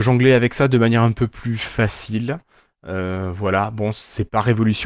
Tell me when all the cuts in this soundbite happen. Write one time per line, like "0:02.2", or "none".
none